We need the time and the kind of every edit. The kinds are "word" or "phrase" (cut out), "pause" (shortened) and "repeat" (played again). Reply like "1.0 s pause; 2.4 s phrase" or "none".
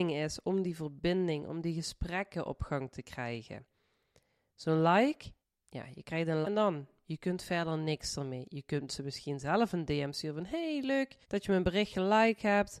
5.4 s pause; 6.4 s word; 11.2 s pause